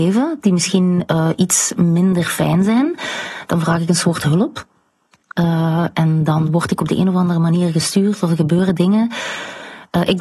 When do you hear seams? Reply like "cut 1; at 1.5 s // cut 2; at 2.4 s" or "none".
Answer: none